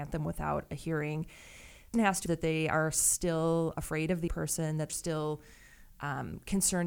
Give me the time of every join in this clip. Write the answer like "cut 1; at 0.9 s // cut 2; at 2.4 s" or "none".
cut 1; at 1.9 s // cut 2; at 2.3 s // cut 3; at 3.7 s // cut 4; at 4.3 s // cut 5; at 4.9 s